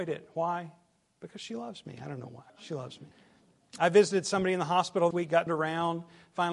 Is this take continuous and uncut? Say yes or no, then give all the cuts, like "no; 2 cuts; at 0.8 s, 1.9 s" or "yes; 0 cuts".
no; 4 cuts; at 2.5 s, 3.1 s, 5.1 s, 5.5 s